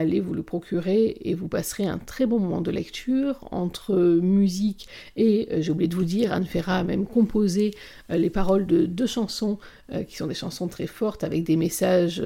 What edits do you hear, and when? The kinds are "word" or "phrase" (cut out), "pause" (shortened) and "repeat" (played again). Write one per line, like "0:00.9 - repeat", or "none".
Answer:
none